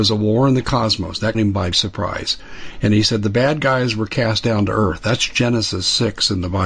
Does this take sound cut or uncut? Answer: cut